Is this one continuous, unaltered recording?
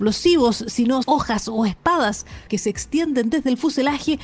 no; 2 cuts; at 1.0 s, 2.5 s

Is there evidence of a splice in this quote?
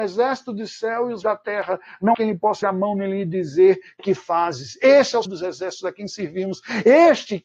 yes; 4 cuts; at 1.2 s, 2.1 s, 2.6 s, 5.3 s

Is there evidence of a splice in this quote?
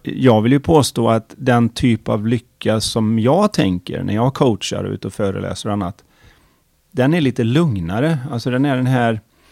no; 0 cuts

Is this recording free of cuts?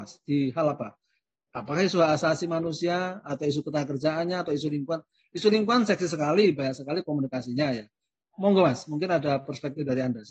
yes; 0 cuts

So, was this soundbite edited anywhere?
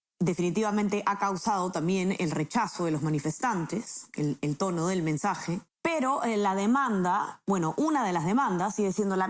no; 0 cuts

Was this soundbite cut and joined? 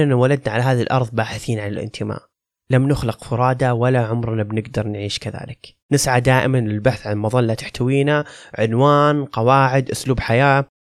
yes; 2 cuts; at 2.3 s, 5.8 s

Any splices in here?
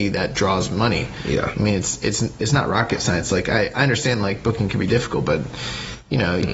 no; 0 cuts

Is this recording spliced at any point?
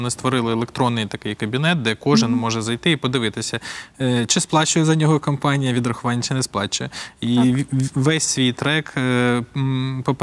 no; 0 cuts

